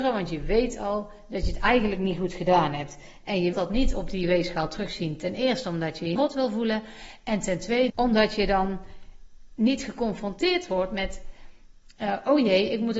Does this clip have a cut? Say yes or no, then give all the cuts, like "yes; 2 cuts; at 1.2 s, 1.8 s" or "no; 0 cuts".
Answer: yes; 3 cuts; at 3.5 s, 6.2 s, 7.9 s